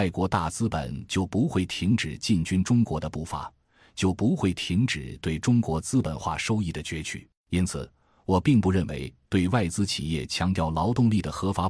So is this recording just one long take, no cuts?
no; 1 cut; at 7.4 s

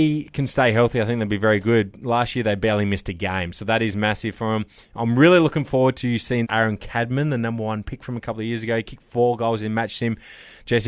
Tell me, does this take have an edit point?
yes; 1 cut; at 6.4 s

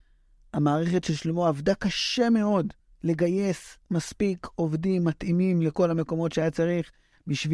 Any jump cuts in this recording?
yes; 1 cut; at 2.8 s

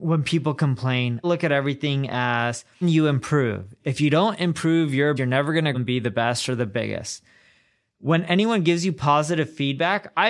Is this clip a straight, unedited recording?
no; 4 cuts; at 1.2 s, 2.8 s, 5.2 s, 5.7 s

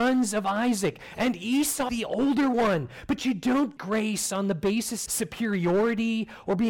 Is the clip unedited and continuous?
no; 3 cuts; at 1.9 s, 3.8 s, 5.1 s

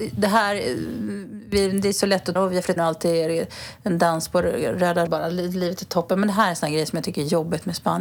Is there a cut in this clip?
yes; 3 cuts; at 2.4 s, 2.8 s, 5.1 s

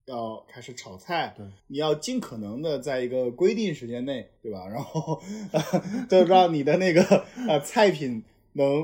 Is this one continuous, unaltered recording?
no; 2 cuts; at 1.6 s, 4.4 s

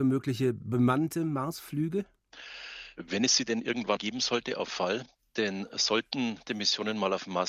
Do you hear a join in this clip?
yes; 3 cuts; at 4.0 s, 4.7 s, 6.5 s

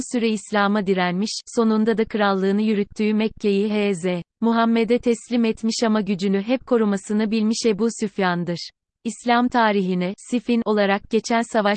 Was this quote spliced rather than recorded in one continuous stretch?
yes; 1 cut; at 4.3 s

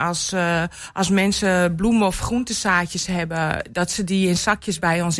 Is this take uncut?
yes; 0 cuts

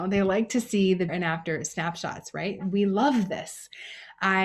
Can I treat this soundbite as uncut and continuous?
no; 1 cut; at 1.1 s

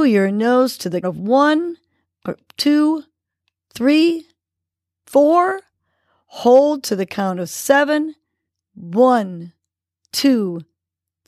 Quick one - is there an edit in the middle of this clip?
yes; 1 cut; at 1.0 s

